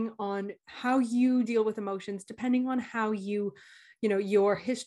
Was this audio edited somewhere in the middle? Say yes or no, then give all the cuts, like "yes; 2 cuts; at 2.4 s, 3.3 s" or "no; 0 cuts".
no; 0 cuts